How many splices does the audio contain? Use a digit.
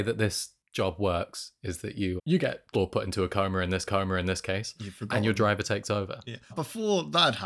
4